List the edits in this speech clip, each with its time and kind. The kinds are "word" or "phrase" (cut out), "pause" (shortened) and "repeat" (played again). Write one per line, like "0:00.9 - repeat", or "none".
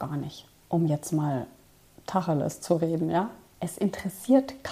none